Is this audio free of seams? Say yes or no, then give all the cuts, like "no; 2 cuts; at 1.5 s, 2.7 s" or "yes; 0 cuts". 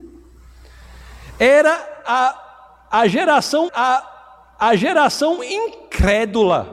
no; 1 cut; at 3.7 s